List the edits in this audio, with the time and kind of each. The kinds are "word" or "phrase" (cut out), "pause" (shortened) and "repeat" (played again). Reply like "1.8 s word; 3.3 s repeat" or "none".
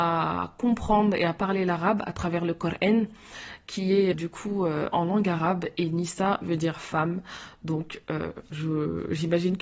4.1 s word